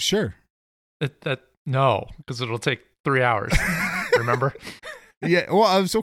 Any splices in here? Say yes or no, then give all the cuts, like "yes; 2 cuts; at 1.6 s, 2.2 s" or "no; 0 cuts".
yes; 1 cut; at 4.8 s